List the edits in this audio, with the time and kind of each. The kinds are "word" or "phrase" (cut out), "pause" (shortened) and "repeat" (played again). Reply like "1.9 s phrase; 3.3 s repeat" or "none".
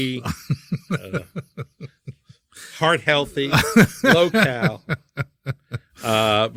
none

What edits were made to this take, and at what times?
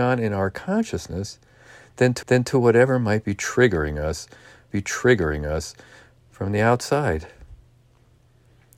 2.2 s repeat; 4.7 s repeat

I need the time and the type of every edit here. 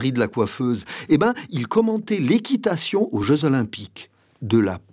none

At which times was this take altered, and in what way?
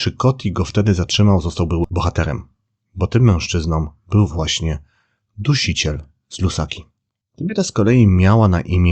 none

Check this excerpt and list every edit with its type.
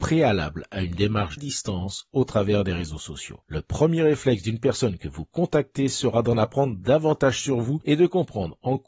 1.4 s phrase

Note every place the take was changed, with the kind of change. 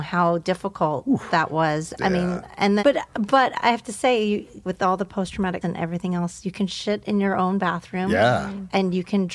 2.8 s word; 4.6 s word; 5.6 s word

